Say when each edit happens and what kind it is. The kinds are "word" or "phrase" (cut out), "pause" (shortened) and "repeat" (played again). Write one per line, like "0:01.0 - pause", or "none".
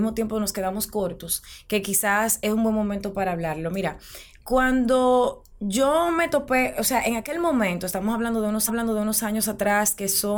0:08.7 - repeat